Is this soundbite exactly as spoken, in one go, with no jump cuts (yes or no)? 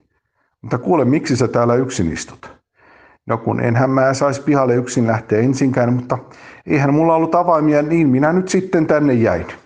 yes